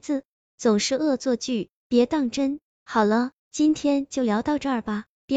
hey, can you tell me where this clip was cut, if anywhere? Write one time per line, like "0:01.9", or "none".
0:03.4